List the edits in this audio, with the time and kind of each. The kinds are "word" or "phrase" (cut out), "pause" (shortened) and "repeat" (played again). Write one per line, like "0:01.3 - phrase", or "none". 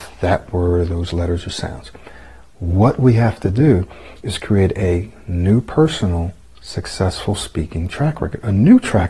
none